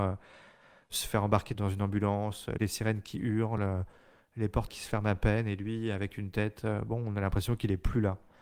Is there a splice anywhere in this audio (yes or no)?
no